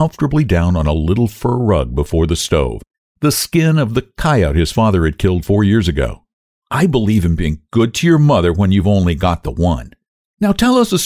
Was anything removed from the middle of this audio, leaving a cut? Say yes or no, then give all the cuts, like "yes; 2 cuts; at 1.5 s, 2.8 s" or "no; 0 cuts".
no; 0 cuts